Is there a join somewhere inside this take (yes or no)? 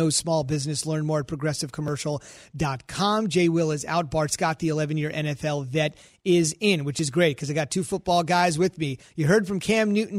no